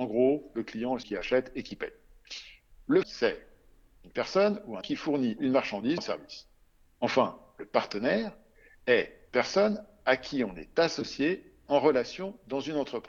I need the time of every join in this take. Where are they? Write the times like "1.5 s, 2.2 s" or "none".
1.0 s, 3.0 s, 4.8 s, 5.4 s, 6.0 s, 9.3 s

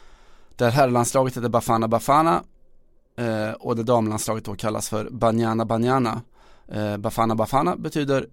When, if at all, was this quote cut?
none

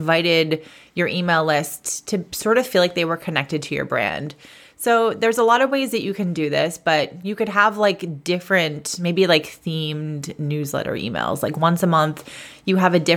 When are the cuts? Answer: none

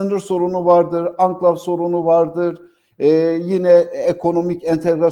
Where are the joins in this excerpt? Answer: none

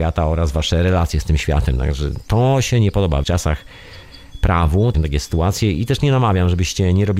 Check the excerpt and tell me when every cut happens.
3.2 s, 4.9 s

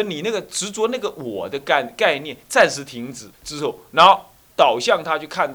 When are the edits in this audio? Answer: 3.3 s

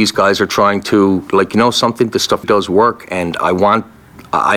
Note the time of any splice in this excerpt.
2.4 s

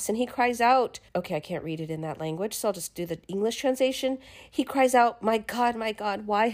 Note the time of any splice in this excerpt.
1.1 s

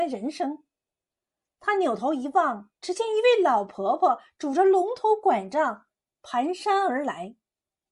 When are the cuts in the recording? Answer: 2.8 s

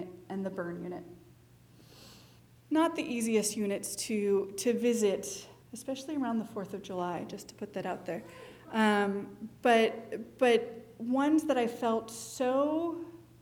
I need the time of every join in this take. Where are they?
2.4 s, 5.6 s

